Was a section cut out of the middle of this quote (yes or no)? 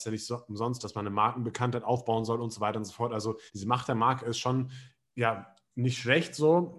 yes